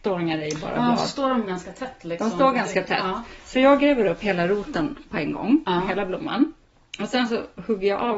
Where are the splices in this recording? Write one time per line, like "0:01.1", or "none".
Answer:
none